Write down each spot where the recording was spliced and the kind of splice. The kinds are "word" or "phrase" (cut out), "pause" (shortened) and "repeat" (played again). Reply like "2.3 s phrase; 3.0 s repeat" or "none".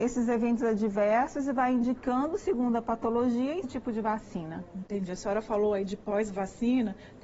3.6 s word

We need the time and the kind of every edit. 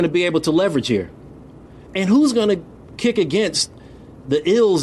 none

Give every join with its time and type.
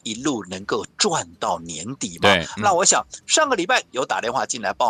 3.9 s pause

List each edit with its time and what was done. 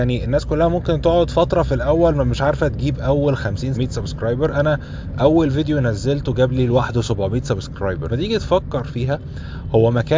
3.7 s word; 8.1 s phrase

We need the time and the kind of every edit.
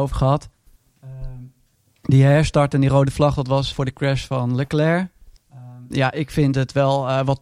3.7 s word

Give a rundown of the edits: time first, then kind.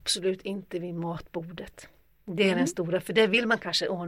none

